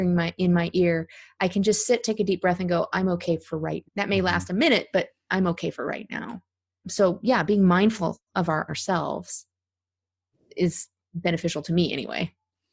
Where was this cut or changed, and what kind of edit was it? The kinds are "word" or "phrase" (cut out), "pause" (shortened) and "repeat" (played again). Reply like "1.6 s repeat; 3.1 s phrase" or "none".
3.8 s word; 6.8 s word; 8.3 s pause; 8.7 s phrase